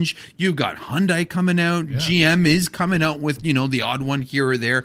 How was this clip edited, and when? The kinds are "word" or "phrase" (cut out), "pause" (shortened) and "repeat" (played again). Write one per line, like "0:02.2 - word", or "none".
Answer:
none